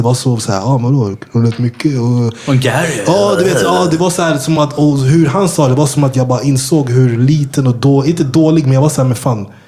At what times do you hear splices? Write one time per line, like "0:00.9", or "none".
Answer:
none